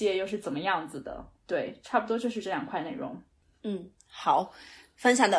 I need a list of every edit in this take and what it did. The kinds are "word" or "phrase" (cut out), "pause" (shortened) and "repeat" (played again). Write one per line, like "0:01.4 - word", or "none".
none